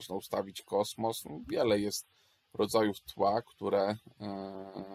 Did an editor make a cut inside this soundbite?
no; 0 cuts

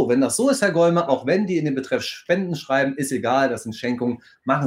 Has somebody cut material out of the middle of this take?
no; 0 cuts

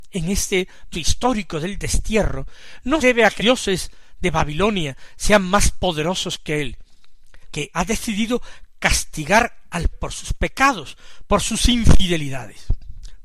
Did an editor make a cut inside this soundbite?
yes; 6 cuts; at 0.9 s, 3.0 s, 3.4 s, 7.4 s, 7.7 s, 9.9 s

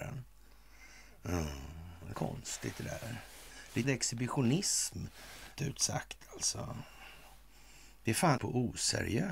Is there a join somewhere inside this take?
yes; 4 cuts; at 2.1 s, 3.8 s, 5.6 s, 8.4 s

